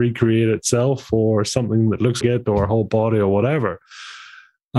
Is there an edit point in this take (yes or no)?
yes